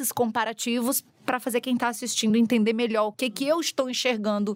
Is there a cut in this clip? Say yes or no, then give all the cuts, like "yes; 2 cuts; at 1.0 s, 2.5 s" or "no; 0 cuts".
no; 0 cuts